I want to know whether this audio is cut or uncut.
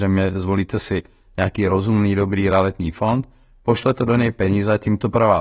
uncut